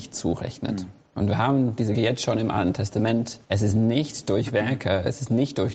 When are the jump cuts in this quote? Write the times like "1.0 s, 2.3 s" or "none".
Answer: 1.0 s, 1.9 s, 3.4 s